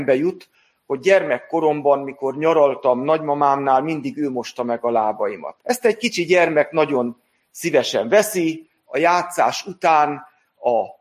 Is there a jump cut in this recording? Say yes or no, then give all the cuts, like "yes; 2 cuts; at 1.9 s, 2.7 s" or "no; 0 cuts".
yes; 1 cut; at 5.6 s